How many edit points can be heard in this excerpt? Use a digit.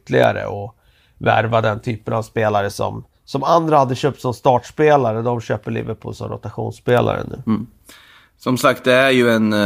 0